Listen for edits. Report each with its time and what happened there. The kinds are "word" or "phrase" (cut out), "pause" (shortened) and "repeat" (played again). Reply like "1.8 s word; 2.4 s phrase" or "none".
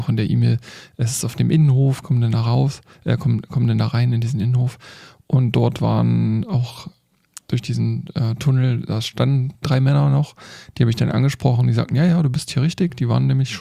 none